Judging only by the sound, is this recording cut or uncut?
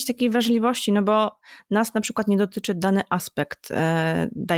uncut